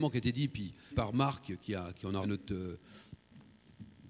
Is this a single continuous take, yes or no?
no